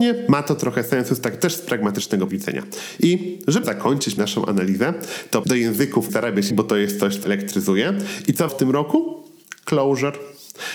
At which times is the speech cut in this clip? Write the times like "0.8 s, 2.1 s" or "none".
2.3 s, 3.6 s, 4.2 s, 5.4 s, 6.1 s, 6.5 s, 7.2 s, 8.5 s